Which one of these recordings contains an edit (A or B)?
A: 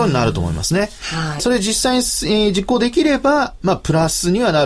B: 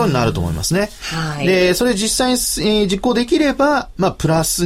A